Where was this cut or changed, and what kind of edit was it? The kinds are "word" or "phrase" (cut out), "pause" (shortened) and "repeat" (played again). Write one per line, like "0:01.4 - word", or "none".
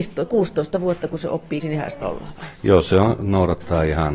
0:01.6 - phrase
0:02.0 - word